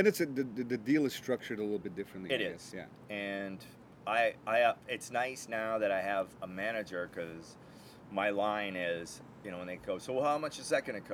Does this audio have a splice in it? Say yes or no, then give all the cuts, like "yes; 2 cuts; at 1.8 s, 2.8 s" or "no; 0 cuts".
no; 0 cuts